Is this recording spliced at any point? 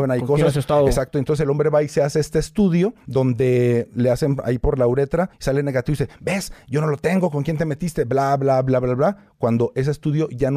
yes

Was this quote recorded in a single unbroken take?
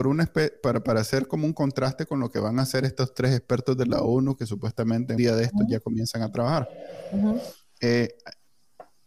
no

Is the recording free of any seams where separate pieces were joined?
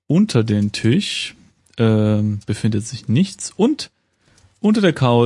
yes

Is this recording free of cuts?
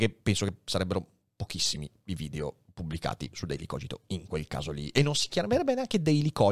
yes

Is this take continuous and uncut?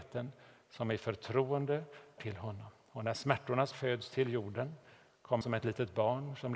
no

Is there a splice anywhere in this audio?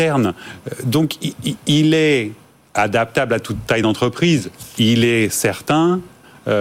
no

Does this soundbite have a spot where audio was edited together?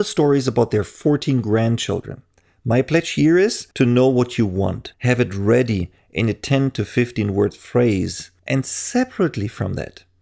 yes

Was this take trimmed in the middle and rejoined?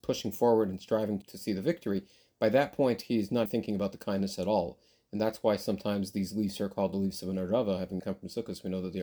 yes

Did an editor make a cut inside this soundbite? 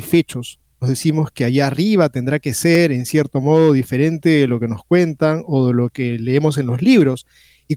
no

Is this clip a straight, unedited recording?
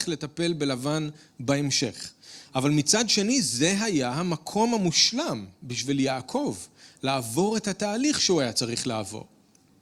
yes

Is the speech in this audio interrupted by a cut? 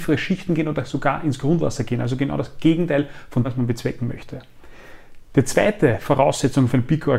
yes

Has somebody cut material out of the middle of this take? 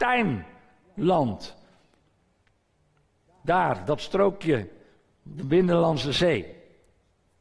no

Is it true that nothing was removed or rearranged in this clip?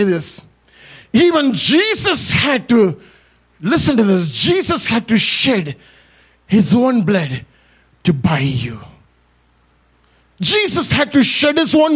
yes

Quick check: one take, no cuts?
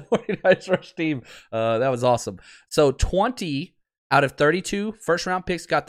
yes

